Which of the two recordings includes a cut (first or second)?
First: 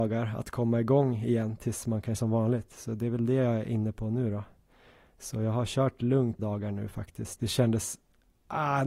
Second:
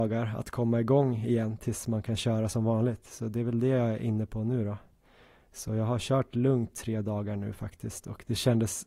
first